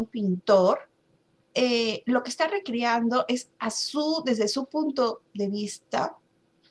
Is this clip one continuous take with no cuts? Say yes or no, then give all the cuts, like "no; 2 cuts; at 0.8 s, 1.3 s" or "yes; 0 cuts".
yes; 0 cuts